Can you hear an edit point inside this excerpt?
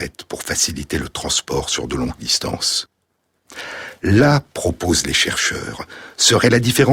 no; 0 cuts

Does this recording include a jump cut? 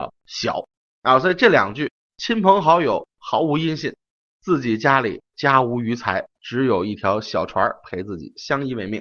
no; 0 cuts

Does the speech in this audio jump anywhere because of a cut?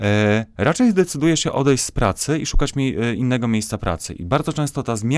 no; 0 cuts

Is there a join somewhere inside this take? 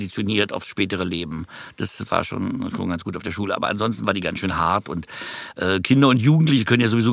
no; 0 cuts

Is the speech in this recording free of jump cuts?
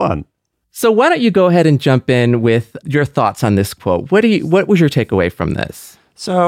yes; 0 cuts

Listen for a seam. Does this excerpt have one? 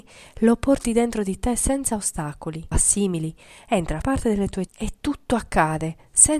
yes; 3 cuts; at 2.7 s, 4.0 s, 4.7 s

